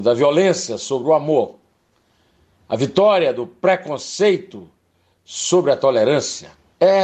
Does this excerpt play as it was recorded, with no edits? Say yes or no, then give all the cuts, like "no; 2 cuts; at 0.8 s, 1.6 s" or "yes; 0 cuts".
yes; 0 cuts